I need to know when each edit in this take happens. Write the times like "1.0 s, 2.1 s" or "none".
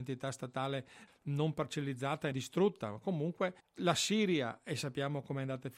1.1 s, 2.3 s, 3.6 s